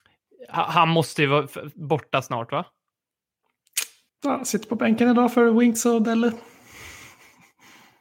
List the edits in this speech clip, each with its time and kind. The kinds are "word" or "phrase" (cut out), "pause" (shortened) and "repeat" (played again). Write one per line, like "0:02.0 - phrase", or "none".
0:04.1 - pause